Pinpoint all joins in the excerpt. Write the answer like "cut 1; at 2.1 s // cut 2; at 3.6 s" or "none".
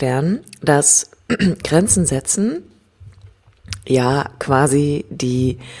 none